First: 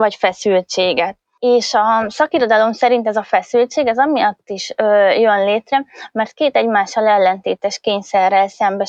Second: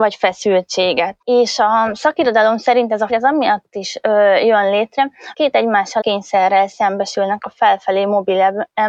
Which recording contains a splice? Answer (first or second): second